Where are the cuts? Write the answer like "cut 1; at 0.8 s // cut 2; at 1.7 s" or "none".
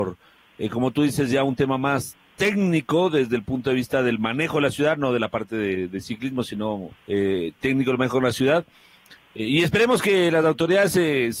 cut 1; at 7.0 s